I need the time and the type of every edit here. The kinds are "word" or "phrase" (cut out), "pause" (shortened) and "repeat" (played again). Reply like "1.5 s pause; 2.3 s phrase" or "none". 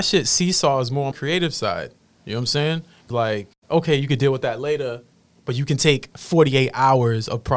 1.1 s word; 3.1 s phrase